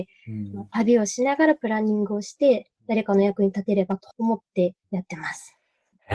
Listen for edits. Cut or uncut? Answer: cut